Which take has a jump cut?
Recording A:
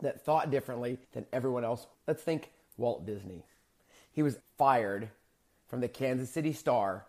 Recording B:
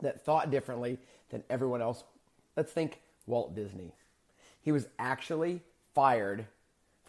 A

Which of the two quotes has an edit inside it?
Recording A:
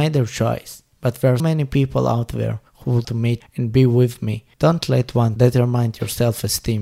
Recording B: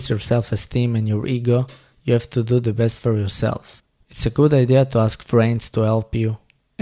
A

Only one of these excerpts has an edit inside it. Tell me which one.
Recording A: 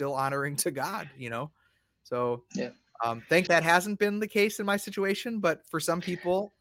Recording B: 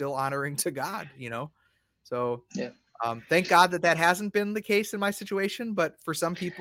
A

